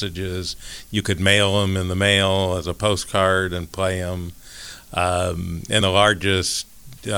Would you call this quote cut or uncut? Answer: cut